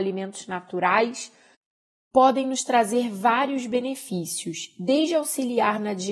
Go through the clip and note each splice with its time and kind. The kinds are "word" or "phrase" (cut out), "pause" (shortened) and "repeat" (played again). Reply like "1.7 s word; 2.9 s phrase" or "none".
none